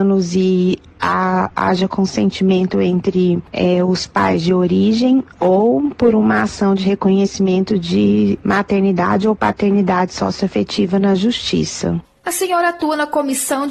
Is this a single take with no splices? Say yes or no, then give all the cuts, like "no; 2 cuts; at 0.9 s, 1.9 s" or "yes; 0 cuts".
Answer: yes; 0 cuts